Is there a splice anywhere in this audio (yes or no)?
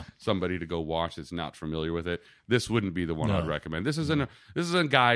no